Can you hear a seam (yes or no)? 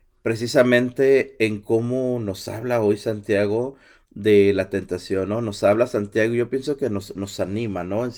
no